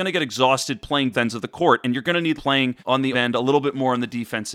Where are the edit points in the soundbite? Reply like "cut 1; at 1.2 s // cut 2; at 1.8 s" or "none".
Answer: cut 1; at 1.1 s // cut 2; at 2.4 s // cut 3; at 2.8 s // cut 4; at 3.1 s

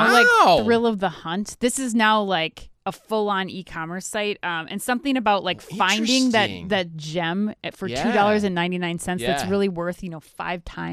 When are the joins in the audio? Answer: none

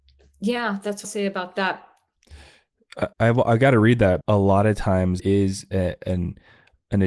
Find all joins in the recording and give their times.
cut 1; at 1.0 s // cut 2; at 3.1 s // cut 3; at 4.2 s // cut 4; at 5.2 s

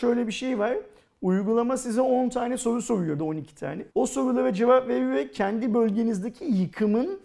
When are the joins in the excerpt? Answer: cut 1; at 3.2 s // cut 2; at 3.9 s

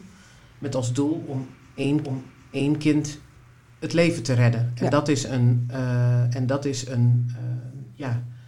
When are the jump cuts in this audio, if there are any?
cut 1; at 2.0 s

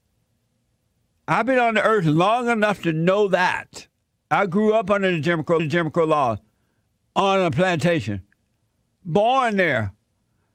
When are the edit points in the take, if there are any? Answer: cut 1; at 5.6 s

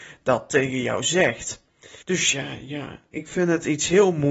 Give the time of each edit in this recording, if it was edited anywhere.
cut 1; at 2.0 s

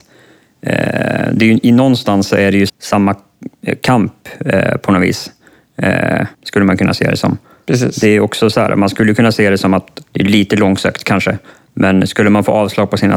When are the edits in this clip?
cut 1; at 2.7 s // cut 2; at 6.3 s // cut 3; at 10.1 s

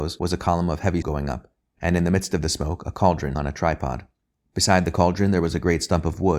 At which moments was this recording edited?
cut 1; at 1.0 s // cut 2; at 3.3 s

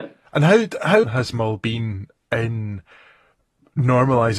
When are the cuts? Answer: cut 1; at 1.0 s

